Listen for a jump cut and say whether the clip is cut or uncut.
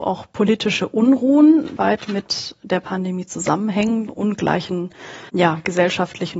cut